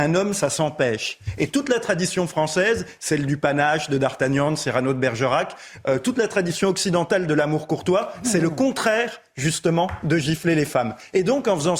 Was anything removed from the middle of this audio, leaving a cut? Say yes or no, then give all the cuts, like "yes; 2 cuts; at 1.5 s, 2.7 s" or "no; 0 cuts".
no; 0 cuts